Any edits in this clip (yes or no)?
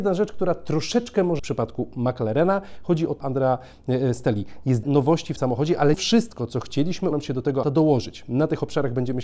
yes